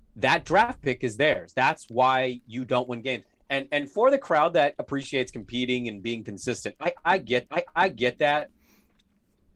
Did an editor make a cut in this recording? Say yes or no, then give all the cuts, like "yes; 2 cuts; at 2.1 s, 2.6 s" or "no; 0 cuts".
yes; 1 cut; at 7.5 s